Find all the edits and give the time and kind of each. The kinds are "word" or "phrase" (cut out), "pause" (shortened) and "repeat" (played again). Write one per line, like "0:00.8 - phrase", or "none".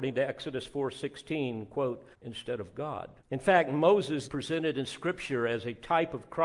0:02.1 - pause
0:03.2 - pause
0:04.2 - word